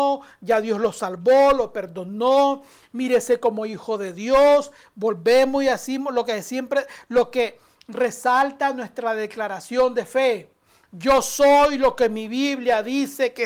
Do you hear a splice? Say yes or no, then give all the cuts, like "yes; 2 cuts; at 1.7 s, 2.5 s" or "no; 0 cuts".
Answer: no; 0 cuts